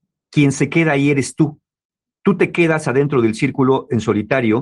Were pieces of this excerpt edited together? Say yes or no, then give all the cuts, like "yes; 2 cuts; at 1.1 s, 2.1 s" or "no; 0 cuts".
no; 0 cuts